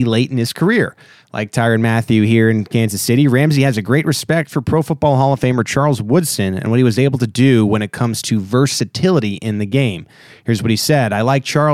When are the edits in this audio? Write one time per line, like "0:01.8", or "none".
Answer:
none